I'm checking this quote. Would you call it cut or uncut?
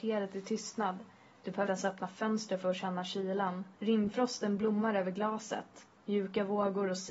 cut